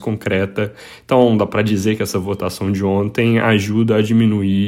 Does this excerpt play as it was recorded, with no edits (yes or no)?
yes